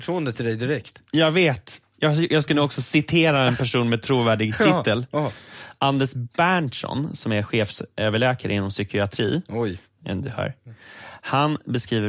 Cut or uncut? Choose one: uncut